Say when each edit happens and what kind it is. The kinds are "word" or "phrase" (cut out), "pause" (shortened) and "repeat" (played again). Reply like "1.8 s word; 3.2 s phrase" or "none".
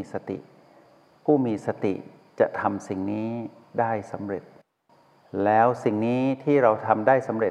none